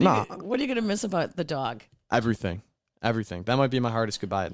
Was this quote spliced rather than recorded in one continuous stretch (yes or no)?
no